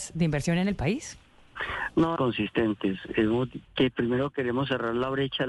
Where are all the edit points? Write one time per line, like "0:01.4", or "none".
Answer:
0:02.2
0:03.7